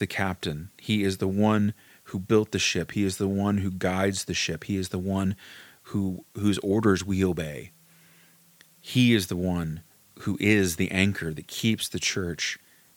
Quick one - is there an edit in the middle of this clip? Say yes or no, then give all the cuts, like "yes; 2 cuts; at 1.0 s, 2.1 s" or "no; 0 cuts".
no; 0 cuts